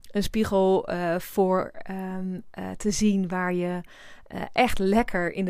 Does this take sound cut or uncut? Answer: uncut